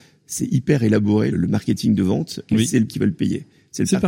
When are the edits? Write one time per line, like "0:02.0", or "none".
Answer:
0:01.3
0:02.9